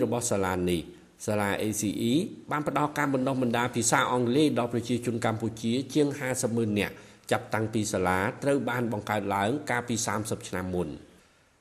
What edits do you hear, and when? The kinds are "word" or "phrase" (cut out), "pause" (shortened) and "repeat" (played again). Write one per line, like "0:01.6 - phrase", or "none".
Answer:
none